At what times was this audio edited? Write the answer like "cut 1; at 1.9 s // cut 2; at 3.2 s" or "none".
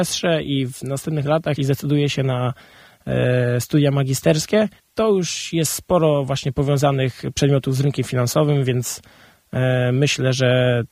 cut 1; at 1.6 s // cut 2; at 4.8 s